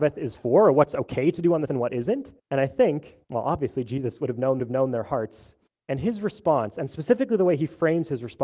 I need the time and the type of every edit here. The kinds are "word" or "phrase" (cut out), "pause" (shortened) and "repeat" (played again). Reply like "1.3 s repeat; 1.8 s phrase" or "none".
1.7 s word; 2.4 s pause; 3.2 s pause; 4.6 s repeat; 5.7 s pause